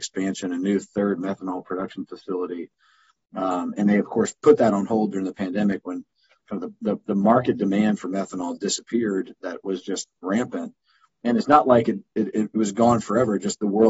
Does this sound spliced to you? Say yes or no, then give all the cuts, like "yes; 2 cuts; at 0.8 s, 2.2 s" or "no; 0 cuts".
no; 0 cuts